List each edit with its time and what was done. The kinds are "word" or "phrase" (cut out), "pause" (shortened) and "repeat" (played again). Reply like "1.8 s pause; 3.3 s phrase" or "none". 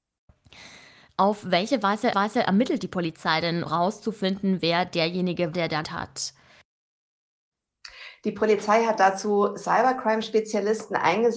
2.1 s repeat; 3.7 s word; 5.5 s word; 5.8 s word